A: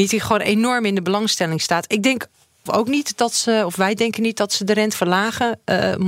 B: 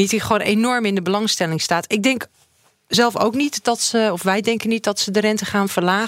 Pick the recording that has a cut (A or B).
A